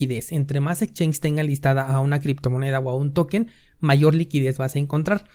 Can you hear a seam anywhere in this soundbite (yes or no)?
no